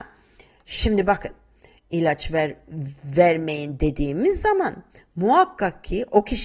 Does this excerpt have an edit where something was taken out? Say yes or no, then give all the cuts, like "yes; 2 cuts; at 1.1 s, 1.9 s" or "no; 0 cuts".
no; 0 cuts